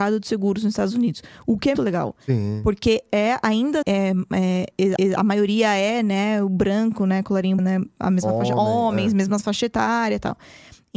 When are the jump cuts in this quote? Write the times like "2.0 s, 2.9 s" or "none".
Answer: 1.7 s, 3.8 s, 5.0 s, 7.6 s

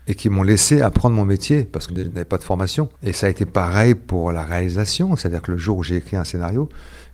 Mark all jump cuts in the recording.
1.9 s, 2.9 s

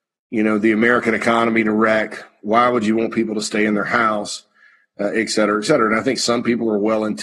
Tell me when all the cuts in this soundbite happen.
none

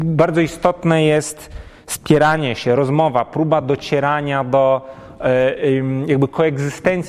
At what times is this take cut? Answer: none

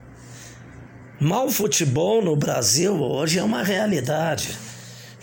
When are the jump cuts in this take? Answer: none

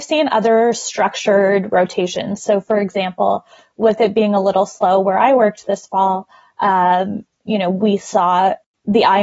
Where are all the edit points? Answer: none

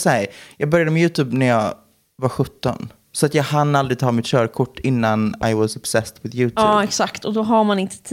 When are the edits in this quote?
none

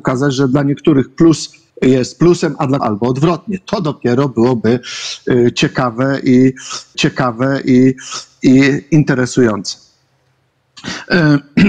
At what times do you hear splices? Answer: 1.7 s, 2.8 s, 6.9 s

